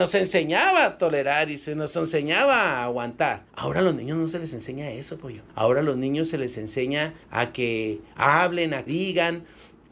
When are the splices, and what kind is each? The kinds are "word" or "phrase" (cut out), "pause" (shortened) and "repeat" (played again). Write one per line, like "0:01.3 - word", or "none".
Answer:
0:03.5 - pause
0:05.5 - pause
0:07.2 - pause
0:08.9 - word